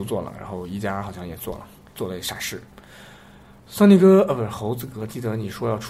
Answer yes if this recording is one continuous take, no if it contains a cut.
no